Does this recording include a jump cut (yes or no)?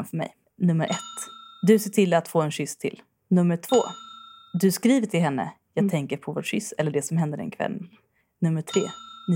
no